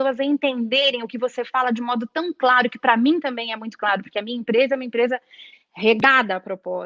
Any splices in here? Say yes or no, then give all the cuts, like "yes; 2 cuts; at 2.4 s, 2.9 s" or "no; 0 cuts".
no; 0 cuts